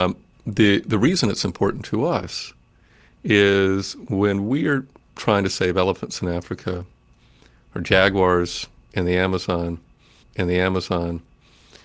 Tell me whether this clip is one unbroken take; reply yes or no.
no